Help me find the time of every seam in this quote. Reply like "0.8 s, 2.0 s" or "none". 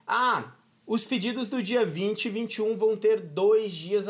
none